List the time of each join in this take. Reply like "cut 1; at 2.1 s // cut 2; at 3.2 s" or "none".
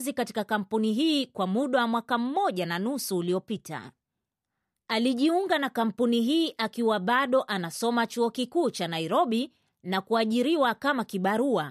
none

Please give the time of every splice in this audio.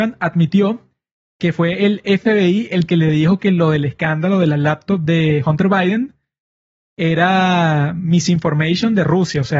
none

